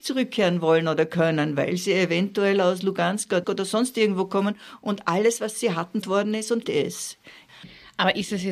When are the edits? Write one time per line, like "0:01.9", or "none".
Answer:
0:03.4
0:06.0
0:06.6